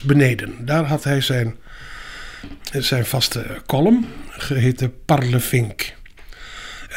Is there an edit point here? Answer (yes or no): no